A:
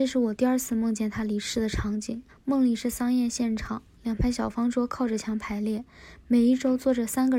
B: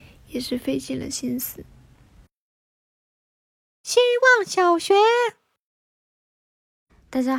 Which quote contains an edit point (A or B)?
A